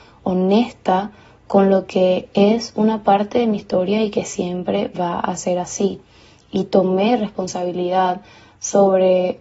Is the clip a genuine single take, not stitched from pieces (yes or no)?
yes